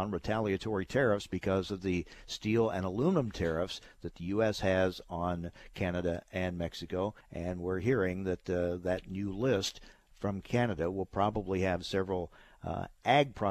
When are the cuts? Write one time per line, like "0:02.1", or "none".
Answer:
0:07.2